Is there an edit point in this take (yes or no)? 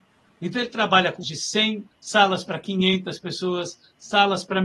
yes